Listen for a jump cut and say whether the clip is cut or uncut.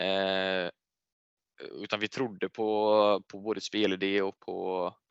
uncut